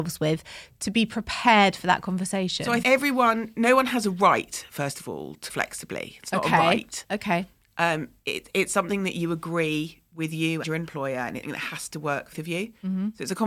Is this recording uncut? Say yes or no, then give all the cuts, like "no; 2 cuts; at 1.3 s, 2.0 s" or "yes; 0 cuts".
no; 5 cuts; at 2.8 s, 5.5 s, 10.6 s, 11.4 s, 12.3 s